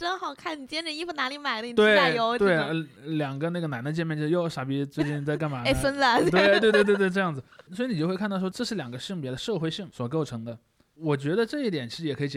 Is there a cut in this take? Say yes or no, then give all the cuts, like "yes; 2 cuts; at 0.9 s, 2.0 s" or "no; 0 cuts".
no; 0 cuts